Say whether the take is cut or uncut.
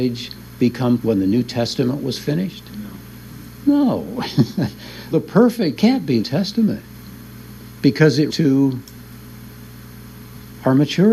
cut